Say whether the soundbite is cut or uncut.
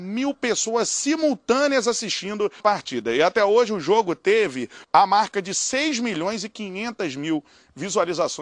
cut